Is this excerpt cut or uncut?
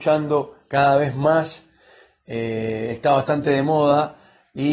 uncut